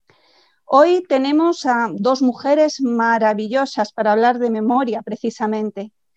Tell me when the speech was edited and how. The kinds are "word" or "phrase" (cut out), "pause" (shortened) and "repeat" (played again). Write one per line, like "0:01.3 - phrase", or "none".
none